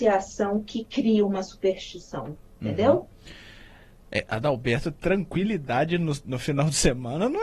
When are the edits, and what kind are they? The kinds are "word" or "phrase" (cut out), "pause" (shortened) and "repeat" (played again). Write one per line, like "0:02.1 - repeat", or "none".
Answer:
none